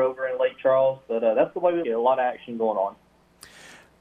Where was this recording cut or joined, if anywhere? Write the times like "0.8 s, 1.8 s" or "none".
1.8 s